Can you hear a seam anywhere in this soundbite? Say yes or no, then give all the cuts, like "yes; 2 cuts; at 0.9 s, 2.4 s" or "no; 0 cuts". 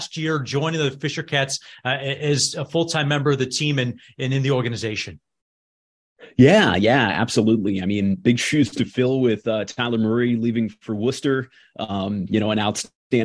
no; 0 cuts